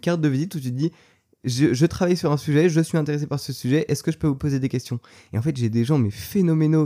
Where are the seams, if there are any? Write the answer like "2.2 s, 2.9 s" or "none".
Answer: none